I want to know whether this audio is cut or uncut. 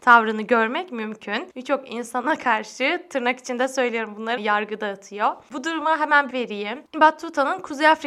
cut